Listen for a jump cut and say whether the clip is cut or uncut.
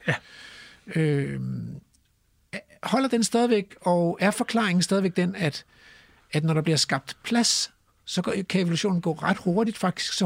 uncut